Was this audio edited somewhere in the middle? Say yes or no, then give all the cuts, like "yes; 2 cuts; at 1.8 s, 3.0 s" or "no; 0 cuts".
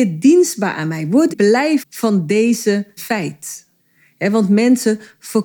yes; 4 cuts; at 1.3 s, 1.8 s, 3.0 s, 3.8 s